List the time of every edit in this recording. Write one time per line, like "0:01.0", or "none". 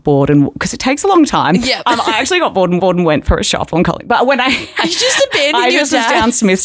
0:02.8